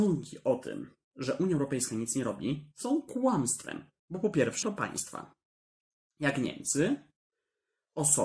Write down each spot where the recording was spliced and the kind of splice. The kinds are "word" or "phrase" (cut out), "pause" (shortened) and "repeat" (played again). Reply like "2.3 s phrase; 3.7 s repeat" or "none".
1.0 s pause; 4.0 s pause; 4.6 s word